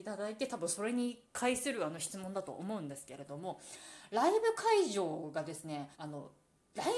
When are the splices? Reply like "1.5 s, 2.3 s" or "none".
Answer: 5.9 s